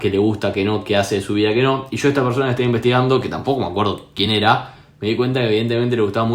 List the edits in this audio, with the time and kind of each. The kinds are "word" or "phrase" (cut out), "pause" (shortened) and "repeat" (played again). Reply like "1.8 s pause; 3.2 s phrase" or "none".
none